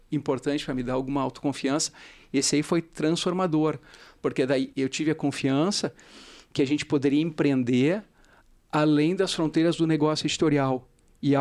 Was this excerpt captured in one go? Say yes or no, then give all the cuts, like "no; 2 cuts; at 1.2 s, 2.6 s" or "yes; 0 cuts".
yes; 0 cuts